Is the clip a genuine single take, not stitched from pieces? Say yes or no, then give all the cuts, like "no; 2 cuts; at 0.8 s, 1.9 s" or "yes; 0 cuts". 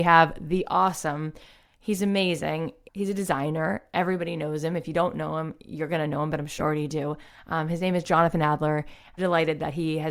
no; 2 cuts; at 6.6 s, 9.2 s